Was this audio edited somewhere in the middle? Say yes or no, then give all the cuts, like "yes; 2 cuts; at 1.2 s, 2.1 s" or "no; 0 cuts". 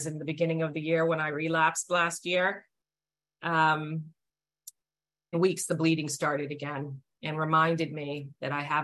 yes; 2 cuts; at 5.3 s, 7.1 s